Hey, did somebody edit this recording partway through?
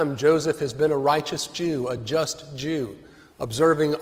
no; 0 cuts

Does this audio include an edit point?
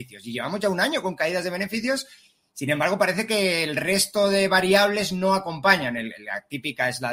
no; 0 cuts

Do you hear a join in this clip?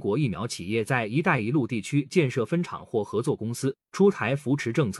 yes; 1 cut; at 3.8 s

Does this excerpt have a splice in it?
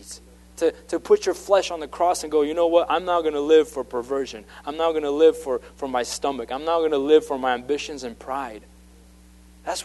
no; 0 cuts

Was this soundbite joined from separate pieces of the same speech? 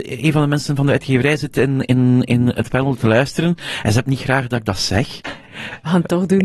no; 0 cuts

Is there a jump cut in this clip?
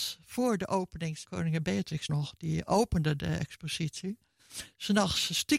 yes; 2 cuts; at 1.2 s, 2.1 s

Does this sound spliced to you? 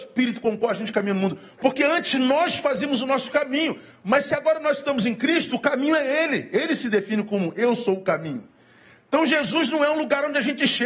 no; 0 cuts

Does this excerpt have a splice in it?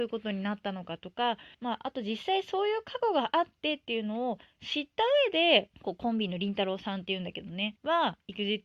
yes; 3 cuts; at 1.5 s, 5.7 s, 7.8 s

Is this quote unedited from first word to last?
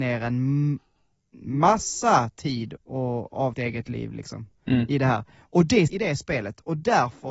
no; 3 cuts; at 2.8 s, 3.5 s, 5.9 s

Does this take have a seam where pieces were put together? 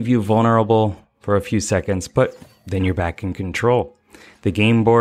no; 0 cuts

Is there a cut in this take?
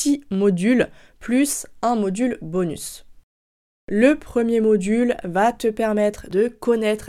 no; 0 cuts

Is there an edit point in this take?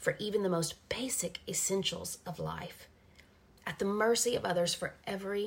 no; 0 cuts

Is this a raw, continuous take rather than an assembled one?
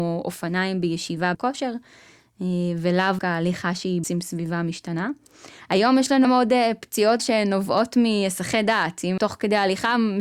no; 6 cuts; at 1.3 s, 3.2 s, 4.0 s, 6.2 s, 7.2 s, 9.2 s

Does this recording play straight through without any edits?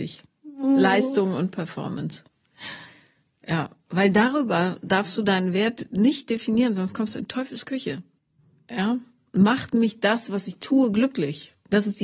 yes; 0 cuts

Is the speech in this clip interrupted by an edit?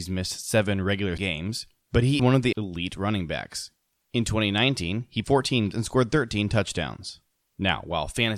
yes; 5 cuts; at 1.2 s, 2.2 s, 2.5 s, 5.2 s, 5.7 s

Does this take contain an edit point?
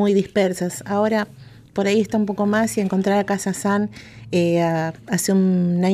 no; 0 cuts

